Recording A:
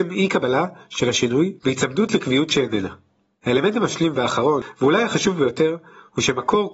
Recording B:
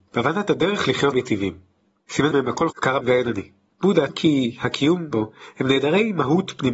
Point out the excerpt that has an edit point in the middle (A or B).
B